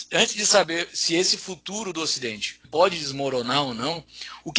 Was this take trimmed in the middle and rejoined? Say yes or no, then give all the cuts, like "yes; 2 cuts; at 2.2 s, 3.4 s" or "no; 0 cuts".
yes; 1 cut; at 2.6 s